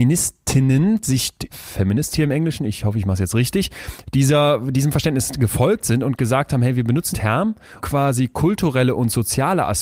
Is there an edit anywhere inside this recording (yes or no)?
yes